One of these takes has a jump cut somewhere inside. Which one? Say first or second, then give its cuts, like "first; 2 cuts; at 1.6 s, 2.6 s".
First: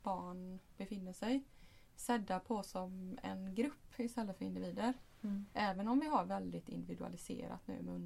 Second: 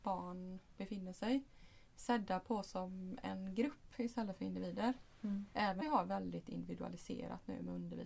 second; 1 cut; at 5.8 s